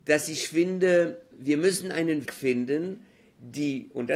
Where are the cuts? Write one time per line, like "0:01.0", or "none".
0:01.3
0:02.3